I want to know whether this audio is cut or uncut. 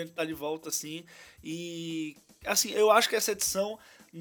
uncut